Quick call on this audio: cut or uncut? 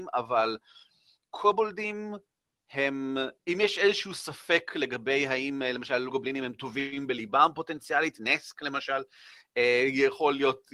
cut